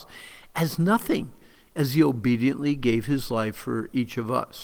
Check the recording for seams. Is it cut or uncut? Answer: uncut